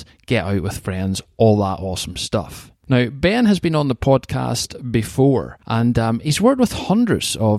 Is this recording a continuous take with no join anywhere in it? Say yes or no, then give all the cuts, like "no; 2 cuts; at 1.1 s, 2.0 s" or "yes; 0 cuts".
no; 1 cut; at 5.6 s